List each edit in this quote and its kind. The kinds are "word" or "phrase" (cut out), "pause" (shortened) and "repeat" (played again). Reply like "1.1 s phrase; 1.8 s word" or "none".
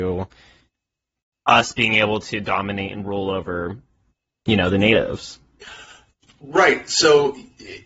none